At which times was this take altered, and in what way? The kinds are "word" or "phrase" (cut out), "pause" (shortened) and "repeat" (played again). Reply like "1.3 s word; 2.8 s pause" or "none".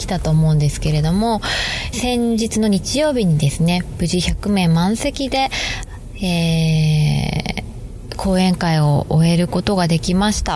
1.9 s phrase